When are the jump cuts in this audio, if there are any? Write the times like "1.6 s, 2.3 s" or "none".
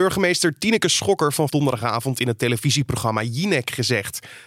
1.5 s